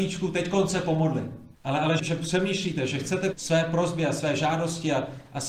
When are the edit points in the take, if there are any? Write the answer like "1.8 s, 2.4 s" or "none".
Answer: 1.5 s, 2.0 s, 3.3 s